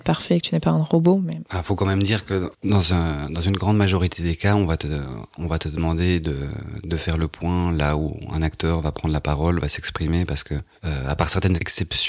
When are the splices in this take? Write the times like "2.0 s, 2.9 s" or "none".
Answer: 2.5 s